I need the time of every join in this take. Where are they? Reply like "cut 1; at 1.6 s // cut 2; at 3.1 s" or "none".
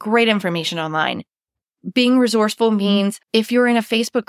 cut 1; at 3.2 s